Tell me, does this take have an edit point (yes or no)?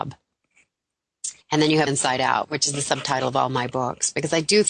yes